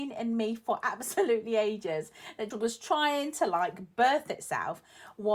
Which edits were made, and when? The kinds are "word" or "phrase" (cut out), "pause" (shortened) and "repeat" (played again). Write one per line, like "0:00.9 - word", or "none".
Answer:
0:02.5 - word

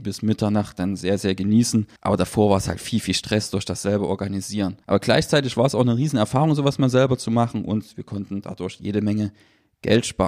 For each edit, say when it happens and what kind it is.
0:02.0 - pause
0:04.8 - pause

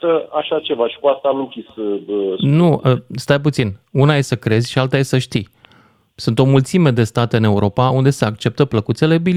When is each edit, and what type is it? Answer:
none

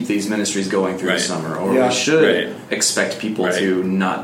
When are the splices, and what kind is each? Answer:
none

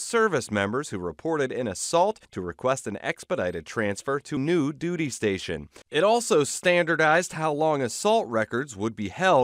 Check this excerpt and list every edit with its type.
0:02.2 - pause
0:04.4 - word
0:05.8 - pause

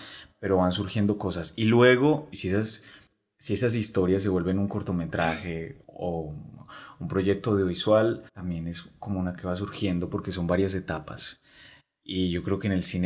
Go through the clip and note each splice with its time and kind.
0:02.3 - word
0:05.8 - pause
0:08.3 - pause
0:09.4 - word

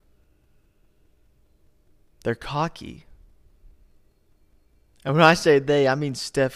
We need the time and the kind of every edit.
none

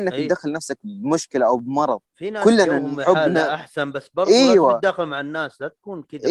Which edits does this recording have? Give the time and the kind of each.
0:02.0 - pause

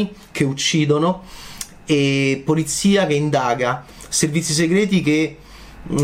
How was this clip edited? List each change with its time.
none

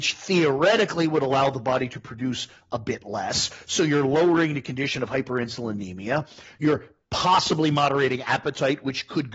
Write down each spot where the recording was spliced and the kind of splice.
none

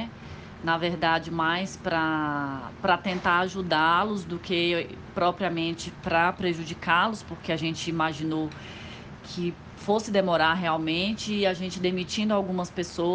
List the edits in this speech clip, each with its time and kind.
none

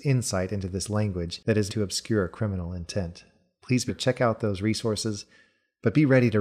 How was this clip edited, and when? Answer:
0:01.7 - word
0:03.9 - word

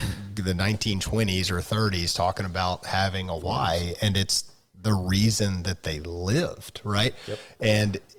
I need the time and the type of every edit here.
none

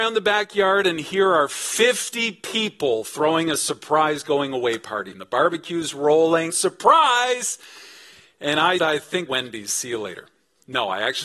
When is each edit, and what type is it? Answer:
0:05.1 - phrase
0:06.5 - phrase
0:08.8 - word
0:09.3 - phrase

